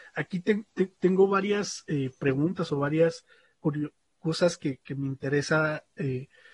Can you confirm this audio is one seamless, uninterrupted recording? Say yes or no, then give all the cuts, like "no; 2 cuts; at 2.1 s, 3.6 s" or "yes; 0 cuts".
yes; 0 cuts